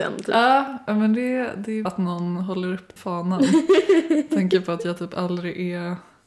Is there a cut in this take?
yes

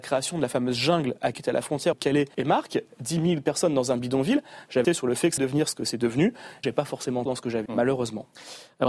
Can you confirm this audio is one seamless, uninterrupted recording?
no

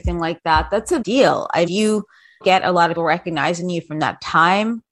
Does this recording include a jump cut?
yes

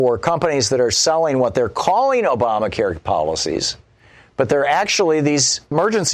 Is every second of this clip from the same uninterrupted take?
yes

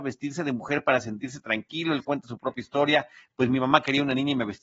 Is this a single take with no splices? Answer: yes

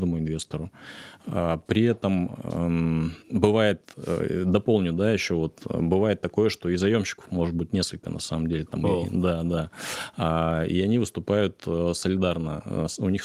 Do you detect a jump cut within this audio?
yes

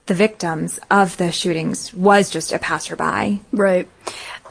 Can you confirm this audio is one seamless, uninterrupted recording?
yes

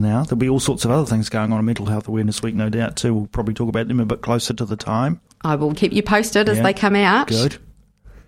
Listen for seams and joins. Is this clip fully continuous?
no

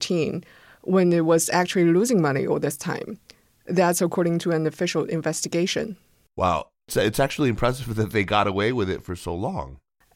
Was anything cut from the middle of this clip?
no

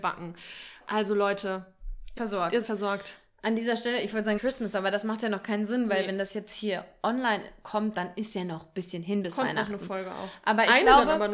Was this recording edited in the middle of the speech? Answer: yes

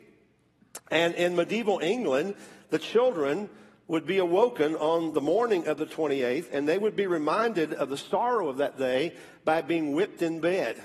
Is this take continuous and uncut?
yes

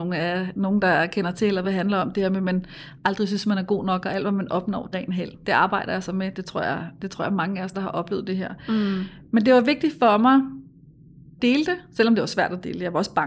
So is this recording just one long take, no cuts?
no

